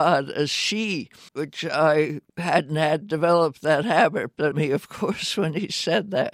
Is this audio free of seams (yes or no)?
no